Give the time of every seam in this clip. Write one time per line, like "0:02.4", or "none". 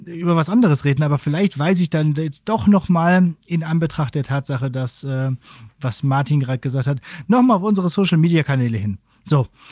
none